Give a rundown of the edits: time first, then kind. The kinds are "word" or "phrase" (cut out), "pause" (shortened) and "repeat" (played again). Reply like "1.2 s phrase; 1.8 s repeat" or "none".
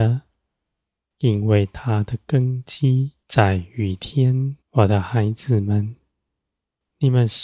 3.2 s pause; 4.6 s pause